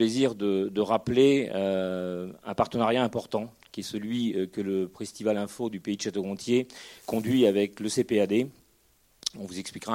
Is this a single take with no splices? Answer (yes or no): yes